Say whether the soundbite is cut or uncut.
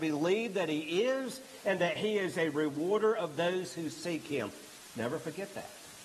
uncut